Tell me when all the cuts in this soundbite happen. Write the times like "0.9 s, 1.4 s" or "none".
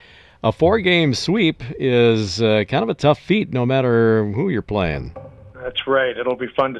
5.5 s